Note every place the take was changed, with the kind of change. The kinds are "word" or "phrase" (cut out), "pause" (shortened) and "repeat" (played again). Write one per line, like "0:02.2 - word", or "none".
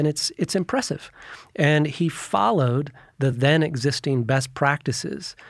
none